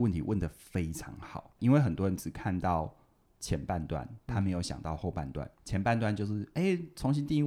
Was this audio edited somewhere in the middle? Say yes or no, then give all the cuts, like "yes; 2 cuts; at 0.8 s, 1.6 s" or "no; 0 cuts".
yes; 2 cuts; at 1.6 s, 5.6 s